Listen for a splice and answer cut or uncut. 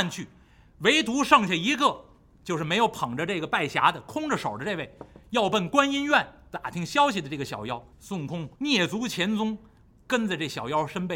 cut